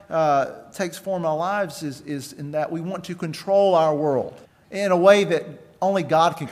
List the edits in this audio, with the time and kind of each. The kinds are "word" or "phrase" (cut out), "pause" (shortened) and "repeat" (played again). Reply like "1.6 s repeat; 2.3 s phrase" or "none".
4.4 s pause